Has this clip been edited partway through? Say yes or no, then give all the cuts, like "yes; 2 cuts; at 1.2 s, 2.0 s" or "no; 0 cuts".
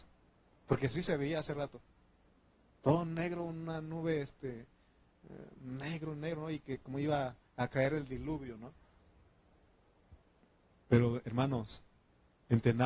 no; 0 cuts